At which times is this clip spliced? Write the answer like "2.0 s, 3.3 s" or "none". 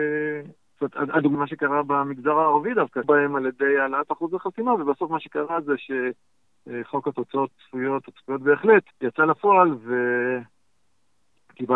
1.3 s, 3.0 s, 7.5 s, 8.9 s